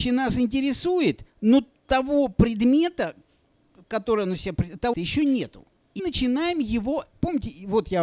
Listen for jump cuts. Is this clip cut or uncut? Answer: cut